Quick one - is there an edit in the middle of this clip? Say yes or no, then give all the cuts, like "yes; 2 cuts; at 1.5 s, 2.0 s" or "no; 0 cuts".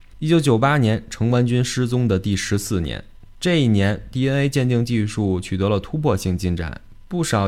no; 0 cuts